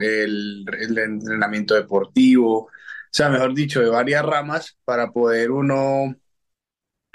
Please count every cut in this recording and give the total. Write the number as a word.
zero